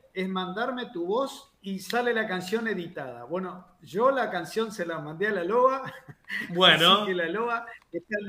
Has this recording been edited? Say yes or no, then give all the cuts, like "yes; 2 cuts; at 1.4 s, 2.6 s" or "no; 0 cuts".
yes; 1 cut; at 1.6 s